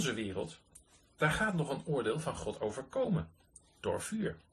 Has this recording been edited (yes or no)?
no